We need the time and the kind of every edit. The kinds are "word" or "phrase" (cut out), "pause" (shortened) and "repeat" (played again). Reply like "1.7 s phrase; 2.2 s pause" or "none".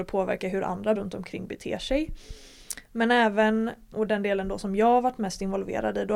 1.0 s word; 3.9 s word